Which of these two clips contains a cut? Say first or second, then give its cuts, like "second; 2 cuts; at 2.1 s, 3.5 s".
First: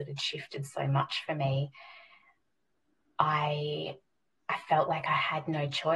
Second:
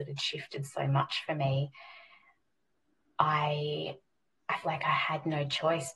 second; 1 cut; at 4.6 s